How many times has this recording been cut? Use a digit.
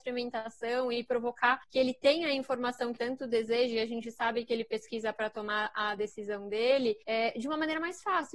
3